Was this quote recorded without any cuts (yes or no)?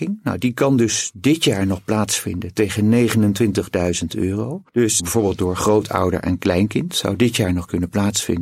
no